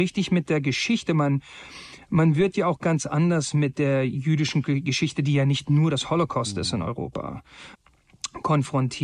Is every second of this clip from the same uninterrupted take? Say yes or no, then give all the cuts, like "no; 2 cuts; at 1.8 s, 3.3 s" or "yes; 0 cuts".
yes; 0 cuts